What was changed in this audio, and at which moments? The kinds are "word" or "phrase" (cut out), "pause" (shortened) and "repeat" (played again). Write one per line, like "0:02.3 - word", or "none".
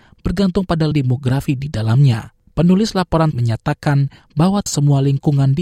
0:00.9 - phrase
0:02.5 - pause
0:03.3 - word
0:04.7 - word

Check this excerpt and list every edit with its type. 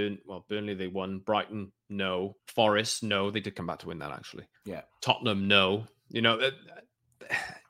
0:02.4 - pause
0:04.6 - pause

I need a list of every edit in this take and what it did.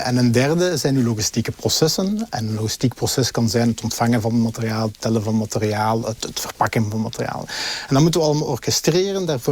none

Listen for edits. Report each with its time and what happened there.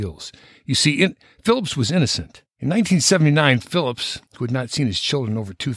0:02.5 - pause
0:04.3 - pause

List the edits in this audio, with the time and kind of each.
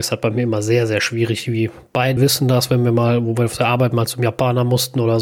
0:02.2 - word

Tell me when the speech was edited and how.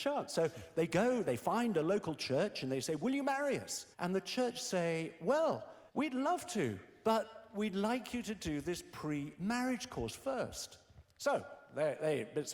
0:03.9 - pause
0:05.9 - pause

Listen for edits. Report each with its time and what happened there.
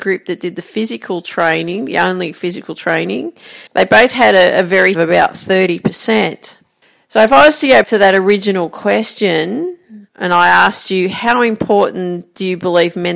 0:03.7 - pause
0:04.9 - phrase
0:06.8 - pause
0:07.8 - word
0:10.1 - pause

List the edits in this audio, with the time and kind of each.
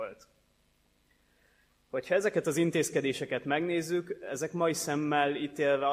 none

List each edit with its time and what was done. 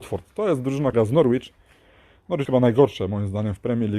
0:00.9 - word
0:02.4 - word

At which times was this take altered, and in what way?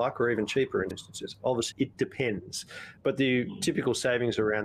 0:00.9 - word
0:01.7 - word
0:03.0 - word

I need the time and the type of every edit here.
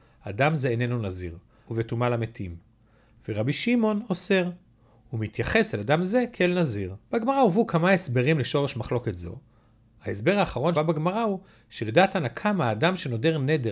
0:01.7 - phrase
0:07.0 - pause
0:10.8 - word

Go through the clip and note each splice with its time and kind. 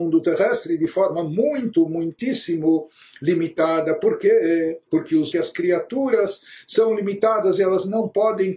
0:04.9 - pause
0:05.3 - phrase

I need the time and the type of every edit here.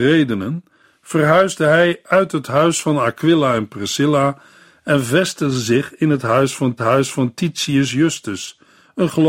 0:06.8 - repeat

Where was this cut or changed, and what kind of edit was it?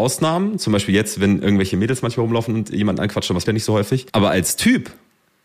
0:03.4 - word
0:04.1 - pause

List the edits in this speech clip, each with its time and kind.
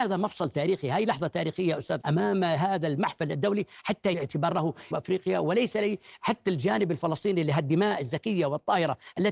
0:02.0 - word
0:04.1 - word
0:04.9 - phrase

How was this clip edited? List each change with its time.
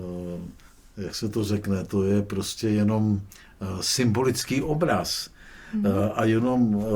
none

